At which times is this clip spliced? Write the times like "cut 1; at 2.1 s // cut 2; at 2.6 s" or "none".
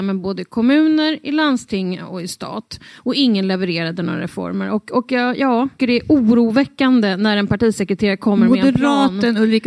cut 1; at 5.8 s